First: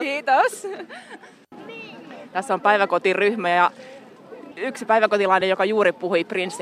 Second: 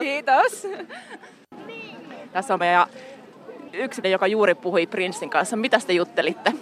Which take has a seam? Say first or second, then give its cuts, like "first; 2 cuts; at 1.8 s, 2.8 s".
second; 2 cuts; at 2.6 s, 4.0 s